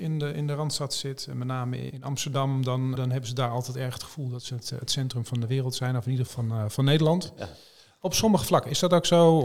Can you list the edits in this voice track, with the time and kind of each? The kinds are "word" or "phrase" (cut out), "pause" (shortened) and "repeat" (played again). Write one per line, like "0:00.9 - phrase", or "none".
0:01.9 - word
0:03.0 - word
0:06.3 - word